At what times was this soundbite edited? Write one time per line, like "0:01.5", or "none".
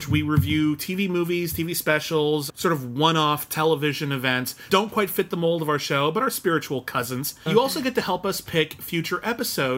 0:02.5
0:04.7
0:07.5